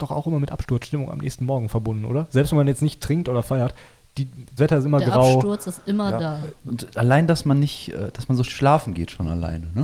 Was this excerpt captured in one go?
no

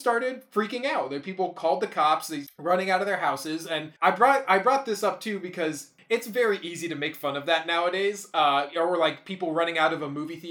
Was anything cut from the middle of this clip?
yes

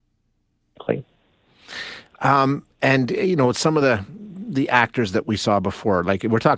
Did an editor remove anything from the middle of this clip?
no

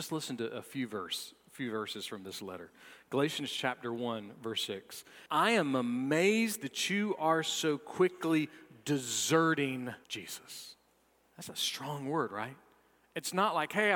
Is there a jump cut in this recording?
yes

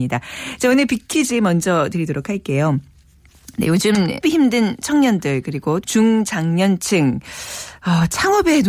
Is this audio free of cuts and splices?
no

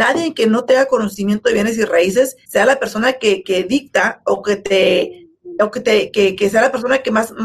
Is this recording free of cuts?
no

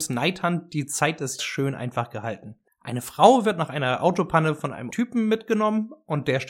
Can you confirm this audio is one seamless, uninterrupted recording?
no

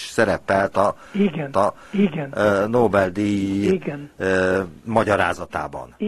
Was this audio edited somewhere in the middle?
yes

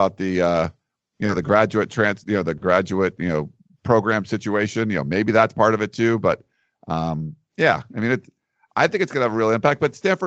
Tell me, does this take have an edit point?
no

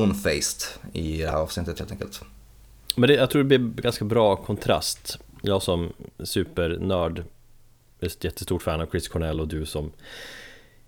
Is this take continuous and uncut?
yes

